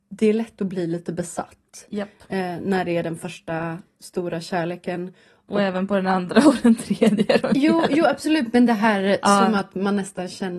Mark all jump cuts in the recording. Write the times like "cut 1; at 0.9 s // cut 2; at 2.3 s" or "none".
none